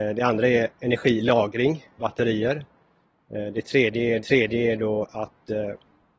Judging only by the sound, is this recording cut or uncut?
cut